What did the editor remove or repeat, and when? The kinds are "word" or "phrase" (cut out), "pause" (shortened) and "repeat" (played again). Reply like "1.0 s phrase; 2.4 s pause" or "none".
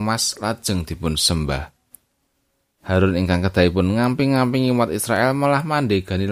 none